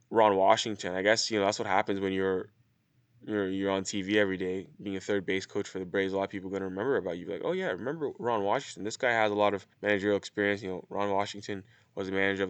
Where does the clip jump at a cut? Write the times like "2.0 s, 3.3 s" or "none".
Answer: 4.7 s, 9.7 s